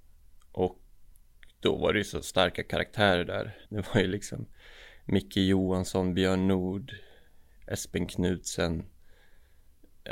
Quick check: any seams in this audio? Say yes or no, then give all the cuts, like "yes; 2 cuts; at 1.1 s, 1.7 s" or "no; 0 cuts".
yes; 1 cut; at 3.7 s